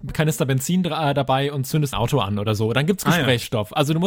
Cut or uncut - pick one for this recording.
cut